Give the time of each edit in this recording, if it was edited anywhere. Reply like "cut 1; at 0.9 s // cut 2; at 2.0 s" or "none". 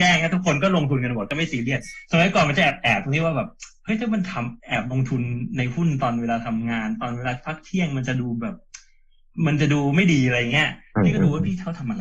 cut 1; at 4.6 s